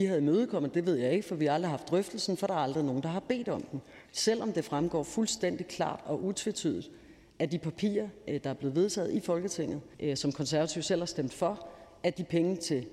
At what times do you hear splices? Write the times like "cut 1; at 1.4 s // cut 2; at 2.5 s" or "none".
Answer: cut 1; at 9.9 s